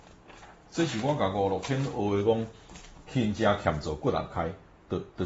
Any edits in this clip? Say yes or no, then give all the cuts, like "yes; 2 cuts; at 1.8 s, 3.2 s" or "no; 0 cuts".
yes; 1 cut; at 3.0 s